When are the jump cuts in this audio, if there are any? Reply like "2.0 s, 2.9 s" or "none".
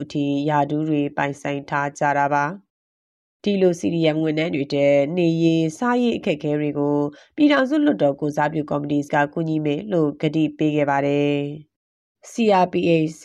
9.1 s